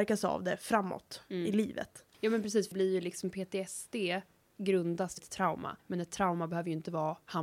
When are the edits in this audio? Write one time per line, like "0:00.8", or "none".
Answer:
0:02.1
0:02.7
0:05.2
0:05.8